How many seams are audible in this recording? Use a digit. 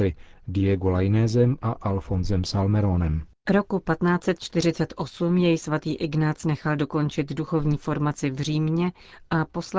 1